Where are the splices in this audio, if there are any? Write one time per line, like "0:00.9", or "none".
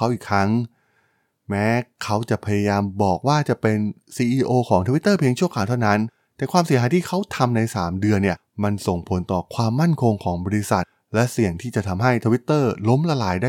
none